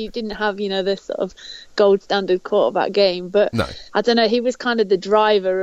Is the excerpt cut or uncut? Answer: cut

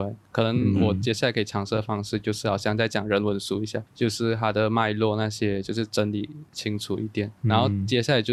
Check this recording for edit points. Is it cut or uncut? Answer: cut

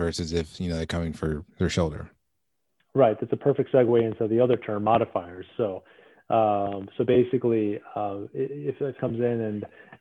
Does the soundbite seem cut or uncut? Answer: cut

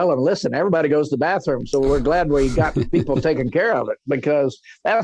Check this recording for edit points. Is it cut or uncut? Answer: uncut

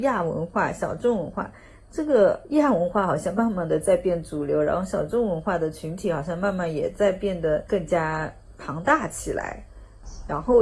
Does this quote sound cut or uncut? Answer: uncut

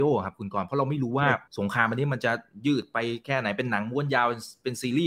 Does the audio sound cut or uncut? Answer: cut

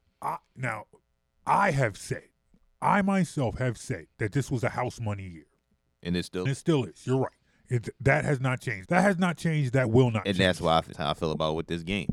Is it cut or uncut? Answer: cut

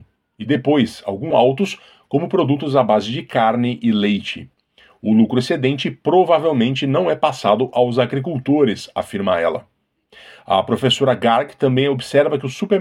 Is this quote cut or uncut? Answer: cut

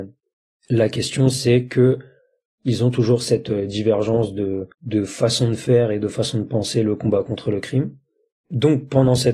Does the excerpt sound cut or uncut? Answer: cut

